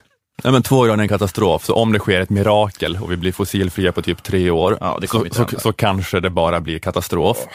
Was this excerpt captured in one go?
yes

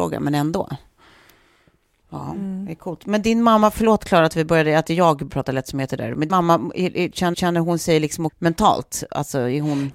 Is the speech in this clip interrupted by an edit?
yes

